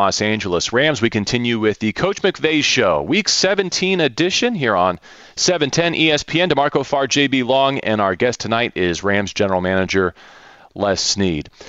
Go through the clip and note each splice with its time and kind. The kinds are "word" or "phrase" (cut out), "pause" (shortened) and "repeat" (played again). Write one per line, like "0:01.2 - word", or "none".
none